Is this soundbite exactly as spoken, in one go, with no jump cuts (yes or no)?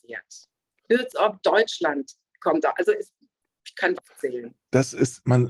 no